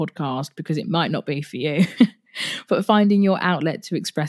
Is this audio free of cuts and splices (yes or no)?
yes